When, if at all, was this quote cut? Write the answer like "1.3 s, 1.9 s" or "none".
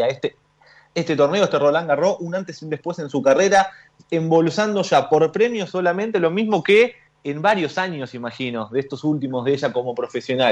none

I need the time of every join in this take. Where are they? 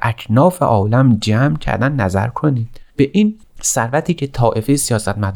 2.9 s, 3.4 s

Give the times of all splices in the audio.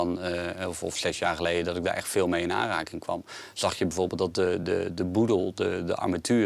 none

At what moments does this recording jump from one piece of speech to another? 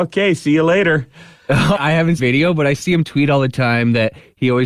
1.8 s, 2.2 s

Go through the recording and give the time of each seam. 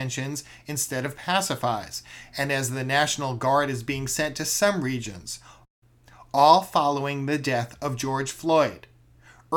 none

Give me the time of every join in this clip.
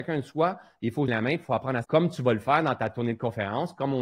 1.1 s, 1.8 s

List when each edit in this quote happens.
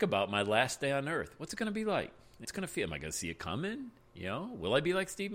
2.4 s

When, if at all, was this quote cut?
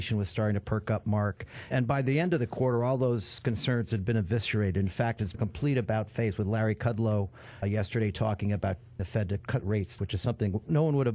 1.7 s, 5.3 s, 7.6 s, 9.0 s, 9.4 s, 10.0 s

